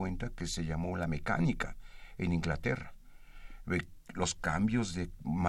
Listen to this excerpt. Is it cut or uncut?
uncut